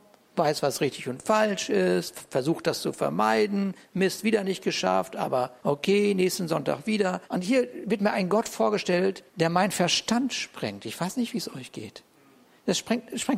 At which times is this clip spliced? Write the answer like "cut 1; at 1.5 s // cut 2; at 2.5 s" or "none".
cut 1; at 5.6 s // cut 2; at 7.2 s // cut 3; at 9.3 s